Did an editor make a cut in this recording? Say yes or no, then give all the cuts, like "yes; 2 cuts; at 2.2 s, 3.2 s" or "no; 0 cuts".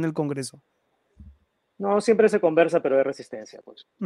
no; 0 cuts